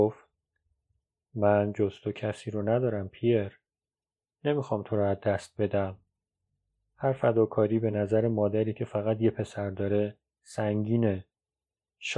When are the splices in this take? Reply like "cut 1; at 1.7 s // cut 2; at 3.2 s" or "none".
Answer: none